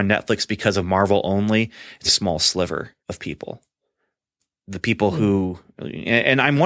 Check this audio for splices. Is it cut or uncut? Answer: cut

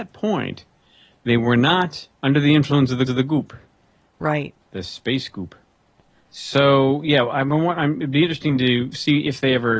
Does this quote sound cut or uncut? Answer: cut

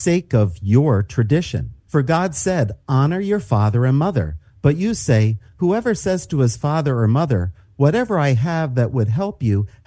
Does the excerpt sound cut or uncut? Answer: uncut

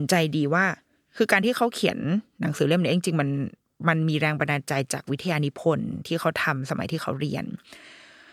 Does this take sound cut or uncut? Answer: uncut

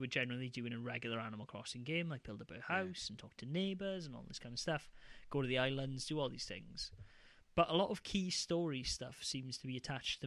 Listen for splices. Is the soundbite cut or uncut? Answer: uncut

